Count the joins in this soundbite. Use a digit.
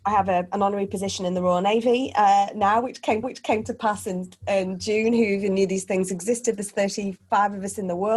1